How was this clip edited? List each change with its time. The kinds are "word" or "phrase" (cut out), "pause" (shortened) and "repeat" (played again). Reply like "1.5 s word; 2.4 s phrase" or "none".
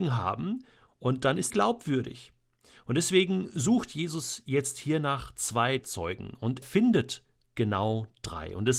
1.5 s word; 5.8 s word; 6.6 s word

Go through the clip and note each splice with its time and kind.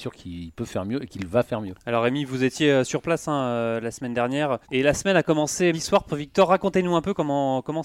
4.6 s pause; 5.7 s word

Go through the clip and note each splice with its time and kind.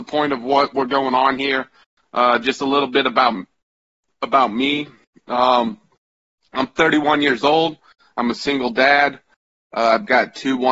none

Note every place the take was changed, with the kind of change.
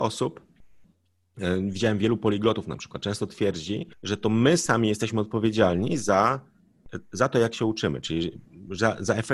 3.9 s pause

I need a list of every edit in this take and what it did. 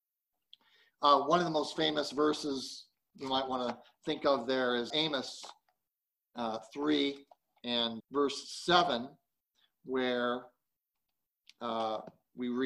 4.9 s word; 8.0 s word

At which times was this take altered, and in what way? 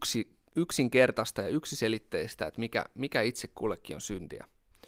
none

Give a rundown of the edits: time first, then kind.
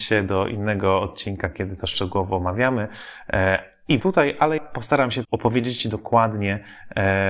4.0 s phrase; 4.6 s word; 5.2 s word

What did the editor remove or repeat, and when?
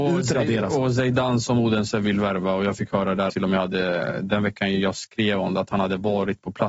3.3 s phrase

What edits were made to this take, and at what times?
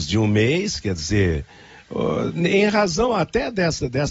none

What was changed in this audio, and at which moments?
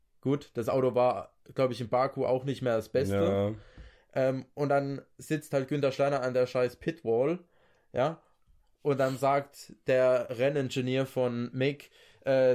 none

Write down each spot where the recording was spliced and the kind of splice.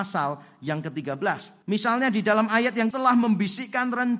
1.6 s pause; 2.9 s phrase

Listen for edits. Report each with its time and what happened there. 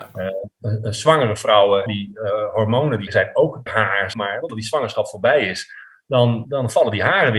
1.9 s phrase; 3.1 s word; 3.7 s word; 4.1 s word; 4.5 s word; 6.4 s word

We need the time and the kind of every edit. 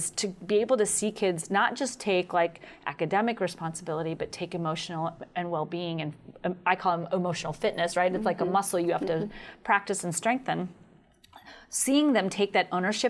none

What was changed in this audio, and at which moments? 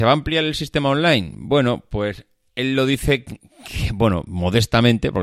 none

